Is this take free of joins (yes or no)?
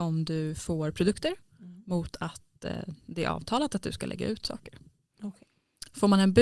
yes